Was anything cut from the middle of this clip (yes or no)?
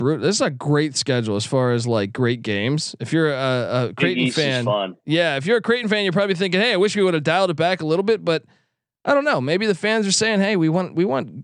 no